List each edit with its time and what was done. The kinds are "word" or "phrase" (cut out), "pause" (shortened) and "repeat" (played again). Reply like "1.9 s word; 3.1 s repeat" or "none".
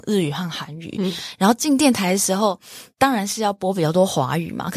2.9 s pause